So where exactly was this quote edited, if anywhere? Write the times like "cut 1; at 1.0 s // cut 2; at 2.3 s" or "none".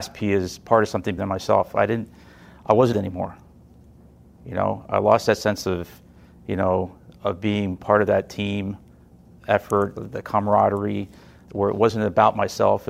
cut 1; at 1.2 s // cut 2; at 2.9 s // cut 3; at 10.0 s // cut 4; at 11.5 s